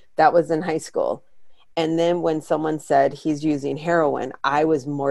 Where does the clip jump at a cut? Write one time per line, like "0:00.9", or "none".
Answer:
none